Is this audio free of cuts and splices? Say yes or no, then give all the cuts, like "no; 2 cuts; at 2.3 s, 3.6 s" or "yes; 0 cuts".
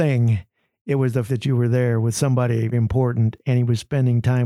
no; 2 cuts; at 1.3 s, 2.7 s